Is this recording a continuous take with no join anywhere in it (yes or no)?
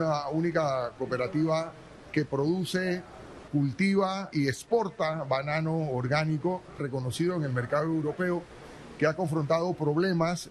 no